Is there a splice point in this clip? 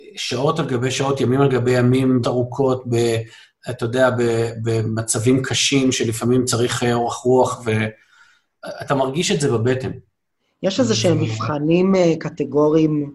yes; 1 cut; at 2.2 s

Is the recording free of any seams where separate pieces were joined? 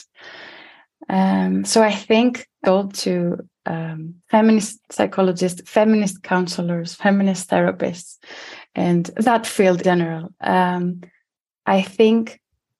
no; 3 cuts; at 2.6 s, 4.2 s, 9.8 s

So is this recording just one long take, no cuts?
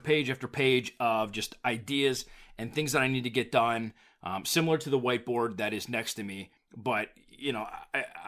no; 1 cut; at 6.6 s

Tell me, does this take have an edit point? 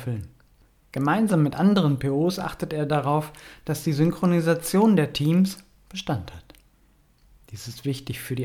no; 0 cuts

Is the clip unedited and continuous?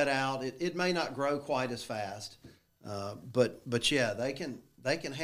yes; 0 cuts

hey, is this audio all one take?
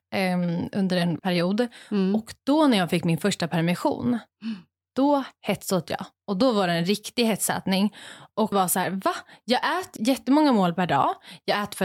no; 3 cuts; at 1.2 s, 8.5 s, 10.0 s

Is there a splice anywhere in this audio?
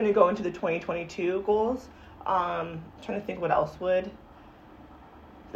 no; 0 cuts

